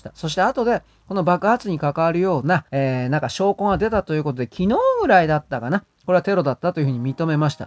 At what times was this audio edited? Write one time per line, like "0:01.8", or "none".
0:02.7